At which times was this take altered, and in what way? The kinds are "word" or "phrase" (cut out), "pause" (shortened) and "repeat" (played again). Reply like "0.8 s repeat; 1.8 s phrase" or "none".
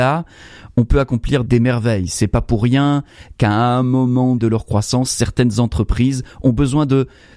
1.5 s word; 4.4 s word